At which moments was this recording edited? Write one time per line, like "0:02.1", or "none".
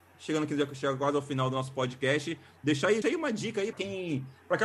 0:03.0
0:03.7